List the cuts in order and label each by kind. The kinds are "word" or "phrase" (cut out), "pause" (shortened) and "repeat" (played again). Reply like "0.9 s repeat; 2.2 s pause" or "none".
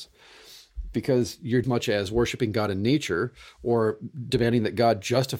1.6 s phrase